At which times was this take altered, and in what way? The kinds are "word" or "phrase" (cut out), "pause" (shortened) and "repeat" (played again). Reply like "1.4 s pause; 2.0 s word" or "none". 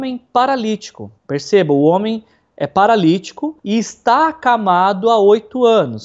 1.2 s pause; 3.6 s pause